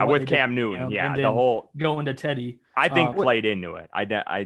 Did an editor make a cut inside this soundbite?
yes; 1 cut; at 3.1 s

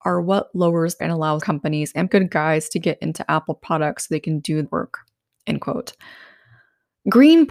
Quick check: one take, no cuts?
no; 4 cuts; at 1.0 s, 1.4 s, 2.1 s, 4.6 s

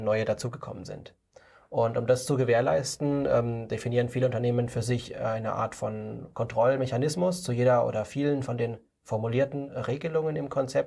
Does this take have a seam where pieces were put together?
no; 0 cuts

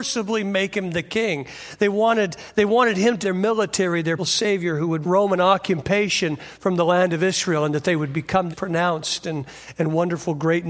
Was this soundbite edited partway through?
yes; 4 cuts; at 3.2 s, 4.2 s, 5.0 s, 8.5 s

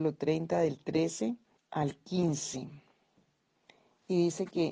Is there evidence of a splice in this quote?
yes; 1 cut; at 1.6 s

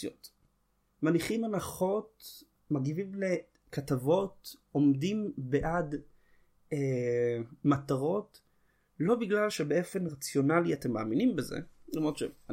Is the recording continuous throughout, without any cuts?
yes; 0 cuts

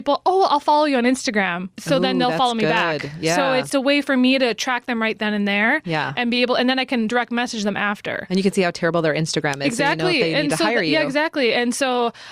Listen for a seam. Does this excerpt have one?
yes; 1 cut; at 1.7 s

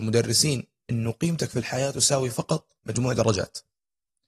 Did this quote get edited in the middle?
yes; 1 cut; at 2.8 s

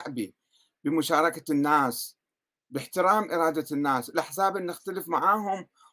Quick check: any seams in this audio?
no; 0 cuts

